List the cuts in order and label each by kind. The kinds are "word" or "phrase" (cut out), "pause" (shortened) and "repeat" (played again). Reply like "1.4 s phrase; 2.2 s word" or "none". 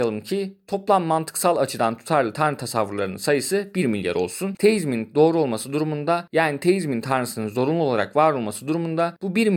none